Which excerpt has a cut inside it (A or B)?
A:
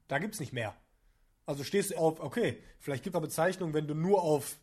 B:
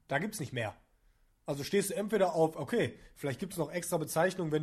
A